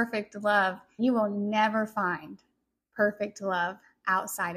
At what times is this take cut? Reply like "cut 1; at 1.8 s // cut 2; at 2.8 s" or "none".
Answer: cut 1; at 1.0 s